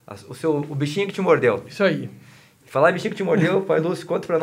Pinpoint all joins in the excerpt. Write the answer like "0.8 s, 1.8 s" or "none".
none